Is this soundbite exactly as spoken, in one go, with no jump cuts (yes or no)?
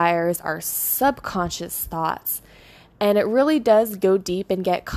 yes